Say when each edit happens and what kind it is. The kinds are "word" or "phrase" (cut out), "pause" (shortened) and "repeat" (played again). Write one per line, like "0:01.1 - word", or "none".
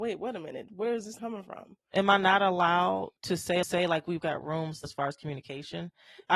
0:01.2 - word
0:03.2 - pause
0:03.6 - repeat
0:04.2 - word
0:04.8 - word